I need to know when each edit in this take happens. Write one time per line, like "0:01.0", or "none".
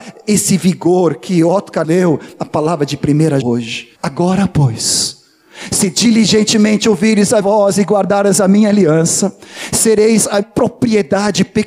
0:01.8
0:03.4
0:03.9
0:07.4
0:10.4

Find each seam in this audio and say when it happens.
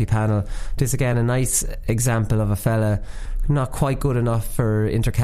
none

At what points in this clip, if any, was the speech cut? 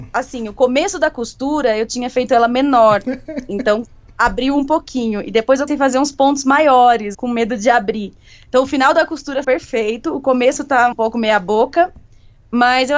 0:05.7
0:07.1
0:09.4
0:10.9

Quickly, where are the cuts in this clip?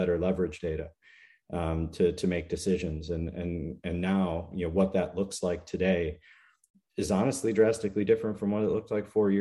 none

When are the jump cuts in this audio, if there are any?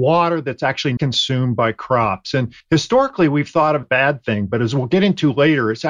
0:01.0
0:02.6
0:03.8

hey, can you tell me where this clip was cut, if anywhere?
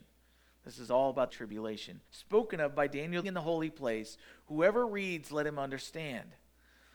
0:01.3
0:02.1
0:03.2

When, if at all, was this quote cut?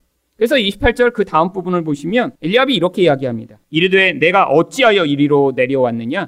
0:02.4
0:03.6

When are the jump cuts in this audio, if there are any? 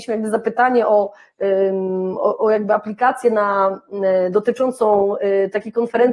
none

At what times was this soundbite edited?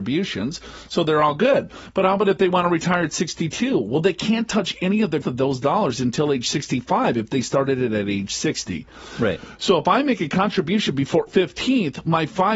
0:05.2
0:11.3

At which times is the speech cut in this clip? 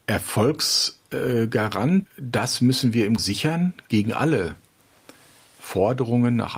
0:02.1
0:03.2

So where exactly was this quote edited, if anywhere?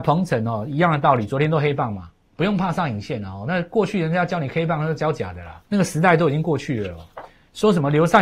0:02.2
0:05.6

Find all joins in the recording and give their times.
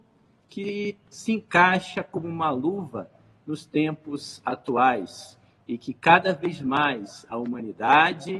none

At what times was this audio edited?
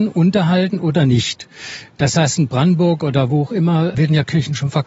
none

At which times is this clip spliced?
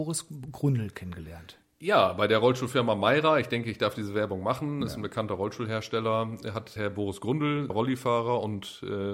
0:06.8
0:07.7

